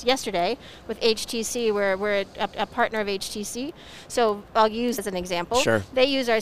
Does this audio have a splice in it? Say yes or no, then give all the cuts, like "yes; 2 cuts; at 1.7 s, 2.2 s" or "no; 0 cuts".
yes; 2 cuts; at 2.5 s, 5.0 s